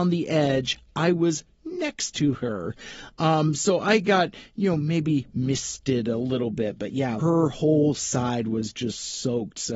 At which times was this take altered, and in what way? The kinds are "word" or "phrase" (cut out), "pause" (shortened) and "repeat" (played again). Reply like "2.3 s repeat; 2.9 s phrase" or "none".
7.2 s phrase